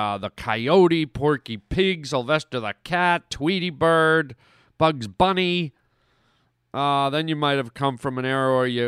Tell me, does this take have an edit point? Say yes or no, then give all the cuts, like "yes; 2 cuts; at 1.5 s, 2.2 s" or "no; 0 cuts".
no; 0 cuts